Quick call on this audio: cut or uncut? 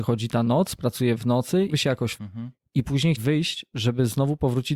cut